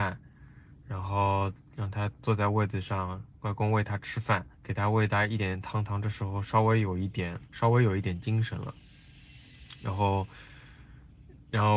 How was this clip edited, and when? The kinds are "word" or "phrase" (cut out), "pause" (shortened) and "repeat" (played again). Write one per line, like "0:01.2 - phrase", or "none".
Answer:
0:04.5 - pause
0:07.4 - pause

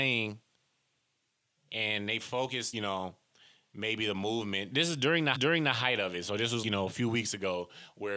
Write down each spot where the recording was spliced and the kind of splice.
0:02.7 - phrase
0:04.7 - word
0:05.3 - repeat
0:06.6 - word

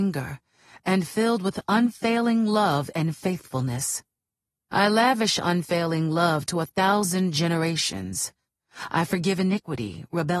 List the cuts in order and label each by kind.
none

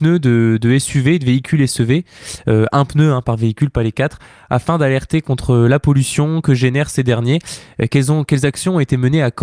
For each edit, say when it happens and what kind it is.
none

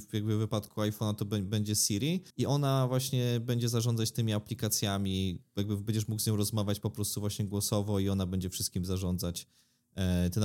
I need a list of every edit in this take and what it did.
0:02.3 - pause

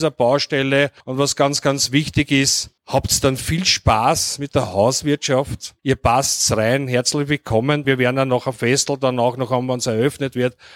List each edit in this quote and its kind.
0:01.0 - pause
0:02.8 - pause
0:05.8 - pause
0:07.8 - word

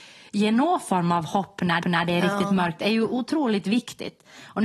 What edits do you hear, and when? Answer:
0:01.8 - repeat

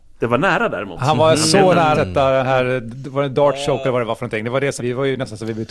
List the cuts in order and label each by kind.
0:01.9 - word
0:04.8 - word

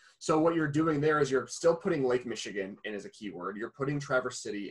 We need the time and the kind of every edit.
none

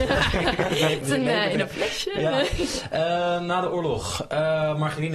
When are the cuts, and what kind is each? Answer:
0:01.0 - word

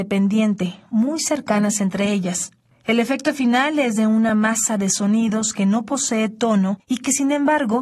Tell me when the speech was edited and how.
none

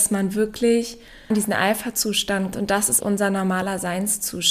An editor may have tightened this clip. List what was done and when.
0:01.3 - word
0:02.5 - word
0:03.0 - word

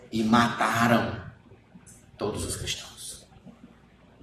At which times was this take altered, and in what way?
none

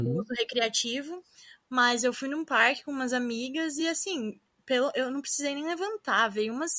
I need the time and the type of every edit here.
none

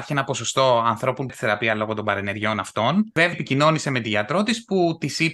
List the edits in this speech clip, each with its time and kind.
0:01.3 - word
0:03.3 - word

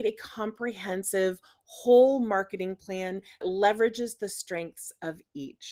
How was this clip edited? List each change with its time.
0:03.4 - word

